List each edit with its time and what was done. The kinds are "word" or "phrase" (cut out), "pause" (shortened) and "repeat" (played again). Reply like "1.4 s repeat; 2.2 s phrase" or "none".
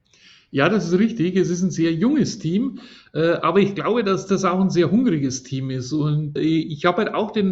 6.4 s word

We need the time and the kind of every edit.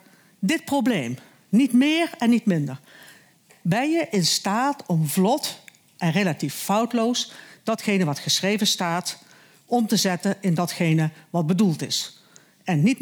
none

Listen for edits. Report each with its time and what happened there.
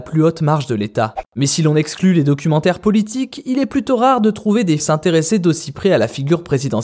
4.8 s word

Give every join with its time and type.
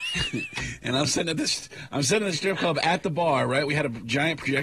none

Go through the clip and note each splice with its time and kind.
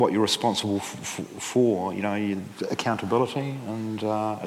none

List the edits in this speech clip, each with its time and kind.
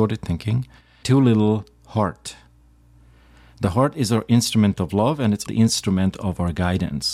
1.0 s word; 5.5 s word

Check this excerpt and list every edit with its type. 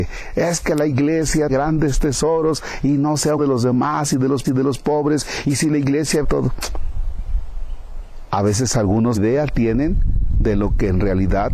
1.5 s word; 3.4 s word; 4.4 s repeat; 6.2 s word; 9.1 s word

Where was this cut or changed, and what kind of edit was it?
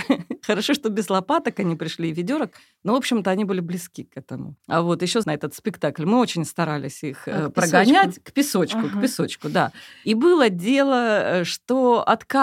4.6 s pause; 5.2 s phrase

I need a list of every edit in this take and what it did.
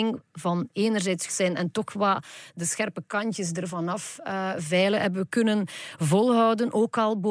1.3 s word

